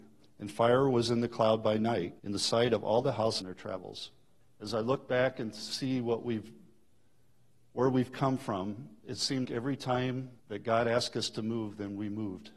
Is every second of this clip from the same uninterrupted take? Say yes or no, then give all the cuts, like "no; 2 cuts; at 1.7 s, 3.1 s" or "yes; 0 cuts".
no; 5 cuts; at 2.2 s, 3.4 s, 4.4 s, 9.4 s, 10.4 s